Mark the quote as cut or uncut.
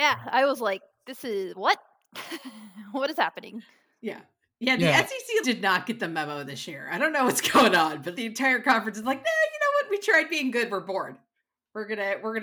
cut